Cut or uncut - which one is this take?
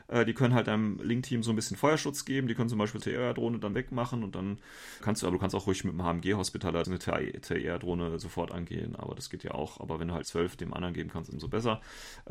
cut